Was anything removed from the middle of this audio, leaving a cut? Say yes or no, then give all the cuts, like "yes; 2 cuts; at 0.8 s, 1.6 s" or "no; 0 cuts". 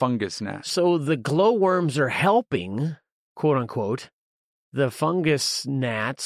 no; 0 cuts